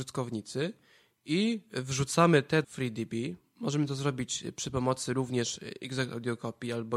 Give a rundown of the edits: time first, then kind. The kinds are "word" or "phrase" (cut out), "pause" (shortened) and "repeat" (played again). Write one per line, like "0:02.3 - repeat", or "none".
0:02.6 - phrase